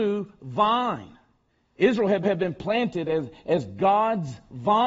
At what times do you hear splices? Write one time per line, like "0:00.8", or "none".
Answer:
0:01.5
0:02.2